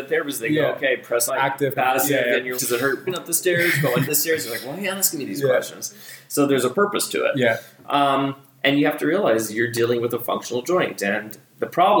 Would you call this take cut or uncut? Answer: cut